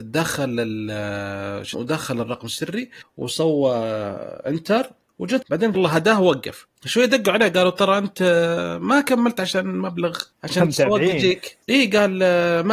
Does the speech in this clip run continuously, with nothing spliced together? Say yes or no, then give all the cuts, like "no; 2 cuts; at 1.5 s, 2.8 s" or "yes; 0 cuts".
no; 5 cuts; at 1.7 s, 5.4 s, 5.7 s, 10.3 s, 11.6 s